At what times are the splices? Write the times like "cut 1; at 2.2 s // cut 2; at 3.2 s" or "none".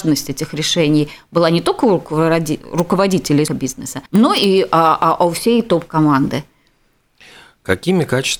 cut 1; at 3.5 s // cut 2; at 4.1 s